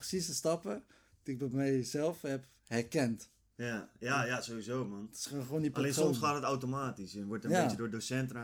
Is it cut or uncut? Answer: uncut